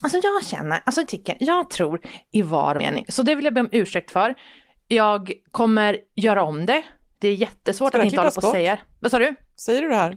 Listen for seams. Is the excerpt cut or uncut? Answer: cut